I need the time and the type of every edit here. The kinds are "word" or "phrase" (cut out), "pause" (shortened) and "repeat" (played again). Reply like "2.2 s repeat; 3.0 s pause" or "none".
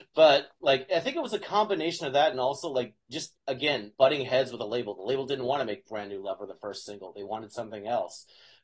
3.9 s pause